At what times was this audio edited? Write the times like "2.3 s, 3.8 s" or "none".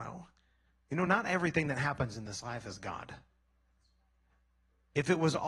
none